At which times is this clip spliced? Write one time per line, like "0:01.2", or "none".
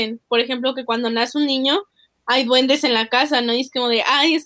none